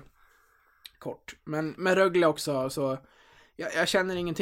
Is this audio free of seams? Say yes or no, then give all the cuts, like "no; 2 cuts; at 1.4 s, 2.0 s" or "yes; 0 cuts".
yes; 0 cuts